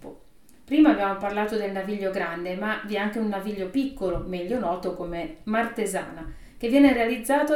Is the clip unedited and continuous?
yes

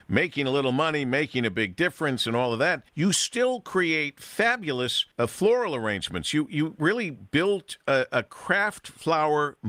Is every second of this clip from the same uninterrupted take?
no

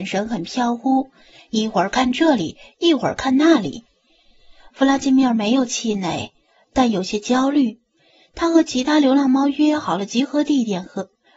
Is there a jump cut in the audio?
no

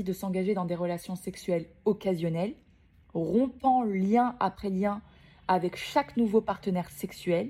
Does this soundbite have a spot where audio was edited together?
no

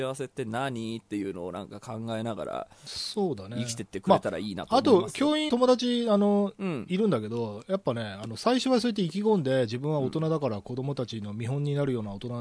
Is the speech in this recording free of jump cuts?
no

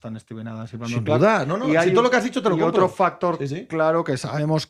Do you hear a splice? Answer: no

